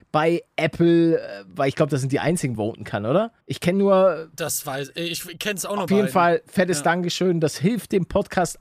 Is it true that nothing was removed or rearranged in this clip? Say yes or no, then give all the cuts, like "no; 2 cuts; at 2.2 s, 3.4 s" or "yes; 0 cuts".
no; 3 cuts; at 2.6 s, 3.4 s, 5.9 s